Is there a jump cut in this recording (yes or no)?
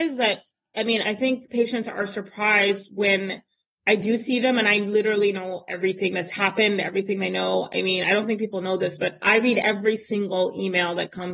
yes